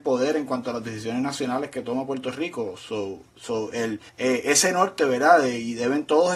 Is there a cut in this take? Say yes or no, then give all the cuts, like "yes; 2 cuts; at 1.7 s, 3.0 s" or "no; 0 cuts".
yes; 1 cut; at 4.1 s